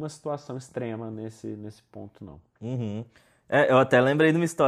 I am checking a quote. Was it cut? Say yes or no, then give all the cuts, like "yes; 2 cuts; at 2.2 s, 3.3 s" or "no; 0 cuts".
no; 0 cuts